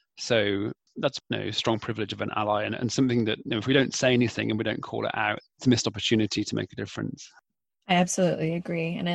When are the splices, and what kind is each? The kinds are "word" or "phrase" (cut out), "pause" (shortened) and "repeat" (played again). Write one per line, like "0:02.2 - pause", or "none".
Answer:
0:01.2 - word
0:05.4 - word